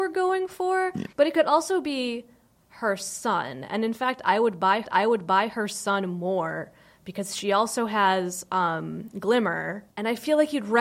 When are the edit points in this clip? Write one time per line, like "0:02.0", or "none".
0:01.1
0:04.8

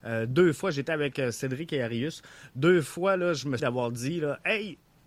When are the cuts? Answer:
0:03.6

